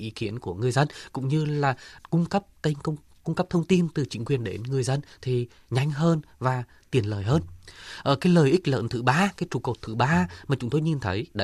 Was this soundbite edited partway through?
no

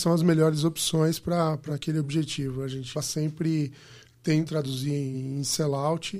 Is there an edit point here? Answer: yes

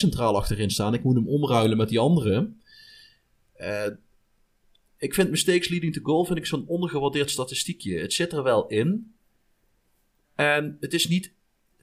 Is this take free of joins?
yes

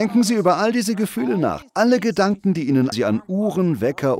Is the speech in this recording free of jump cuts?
no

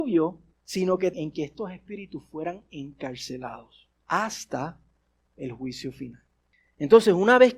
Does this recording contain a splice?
yes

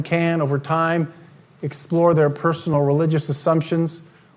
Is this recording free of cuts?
yes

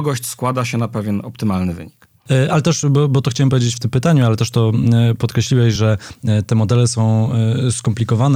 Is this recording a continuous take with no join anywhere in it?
yes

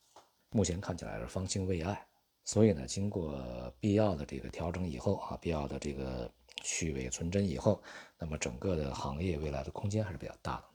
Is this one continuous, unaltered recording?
yes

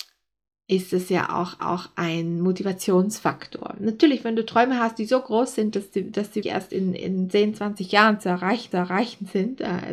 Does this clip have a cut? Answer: yes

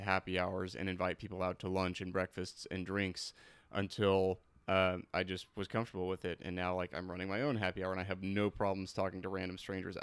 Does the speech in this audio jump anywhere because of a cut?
no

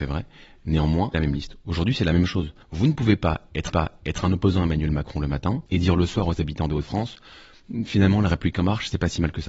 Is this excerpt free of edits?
no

